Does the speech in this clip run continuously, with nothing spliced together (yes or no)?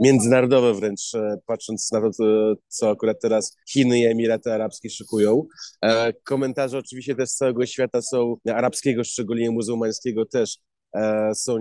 no